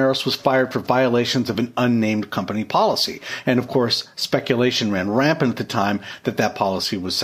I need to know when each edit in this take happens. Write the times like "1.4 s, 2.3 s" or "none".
none